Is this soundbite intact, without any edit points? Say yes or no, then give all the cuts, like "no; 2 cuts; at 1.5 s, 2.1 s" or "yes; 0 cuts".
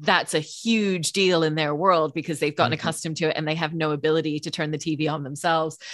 yes; 0 cuts